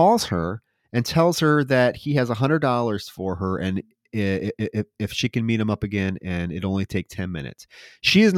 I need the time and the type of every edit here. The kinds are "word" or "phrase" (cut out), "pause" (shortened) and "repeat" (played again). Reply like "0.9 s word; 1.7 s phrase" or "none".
none